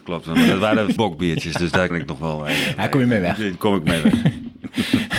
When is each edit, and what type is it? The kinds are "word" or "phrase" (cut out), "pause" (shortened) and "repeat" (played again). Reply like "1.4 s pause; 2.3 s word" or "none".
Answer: 1.0 s word; 1.9 s word